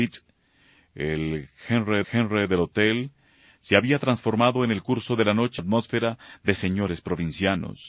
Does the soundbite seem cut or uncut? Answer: cut